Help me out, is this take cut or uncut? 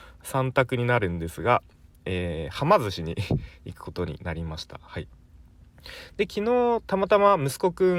uncut